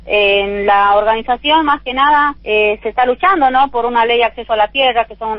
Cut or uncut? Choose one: cut